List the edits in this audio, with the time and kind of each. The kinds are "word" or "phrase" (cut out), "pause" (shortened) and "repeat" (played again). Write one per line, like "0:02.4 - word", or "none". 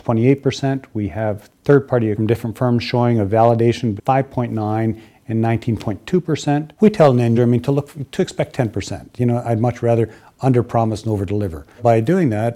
0:02.2 - word
0:04.0 - word
0:07.4 - word